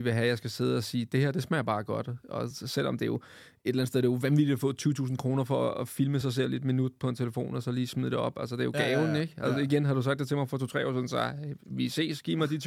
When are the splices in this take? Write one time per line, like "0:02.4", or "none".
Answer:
none